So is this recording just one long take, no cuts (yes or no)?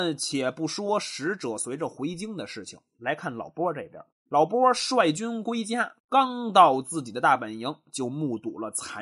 no